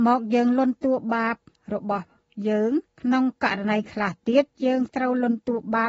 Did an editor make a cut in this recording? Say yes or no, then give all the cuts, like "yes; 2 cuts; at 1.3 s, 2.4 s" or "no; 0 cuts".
yes; 2 cuts; at 1.5 s, 2.9 s